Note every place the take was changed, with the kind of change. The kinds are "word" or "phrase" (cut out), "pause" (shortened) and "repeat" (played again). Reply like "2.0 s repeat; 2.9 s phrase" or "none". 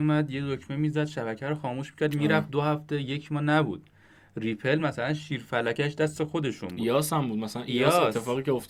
none